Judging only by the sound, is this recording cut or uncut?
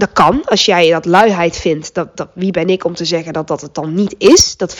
uncut